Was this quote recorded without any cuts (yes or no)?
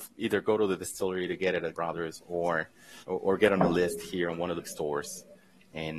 no